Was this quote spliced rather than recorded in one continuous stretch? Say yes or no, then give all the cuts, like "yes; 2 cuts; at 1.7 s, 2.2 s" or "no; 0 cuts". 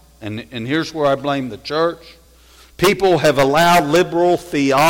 no; 0 cuts